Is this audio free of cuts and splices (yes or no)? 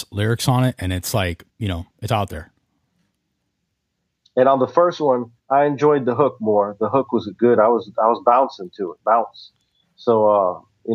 no